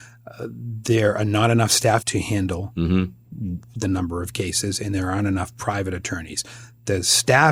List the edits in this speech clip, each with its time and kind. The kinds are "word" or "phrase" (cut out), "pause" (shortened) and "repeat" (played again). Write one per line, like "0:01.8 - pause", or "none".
0:02.0 - word